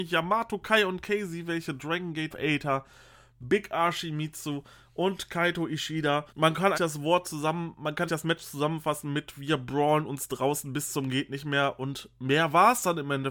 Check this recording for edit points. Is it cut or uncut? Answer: cut